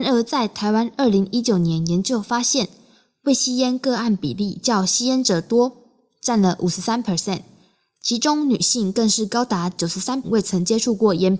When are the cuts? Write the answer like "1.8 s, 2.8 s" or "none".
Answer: 10.2 s